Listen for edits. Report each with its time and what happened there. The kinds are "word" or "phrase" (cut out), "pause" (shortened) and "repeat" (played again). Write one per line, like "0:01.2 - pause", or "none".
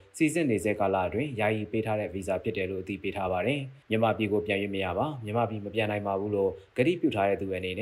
0:03.8 - pause